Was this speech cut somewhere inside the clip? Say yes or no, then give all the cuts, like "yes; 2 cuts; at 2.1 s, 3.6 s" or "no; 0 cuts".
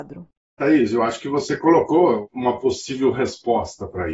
no; 0 cuts